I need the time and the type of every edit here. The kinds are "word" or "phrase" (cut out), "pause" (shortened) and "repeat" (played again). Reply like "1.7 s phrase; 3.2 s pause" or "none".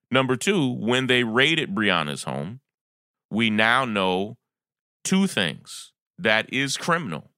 none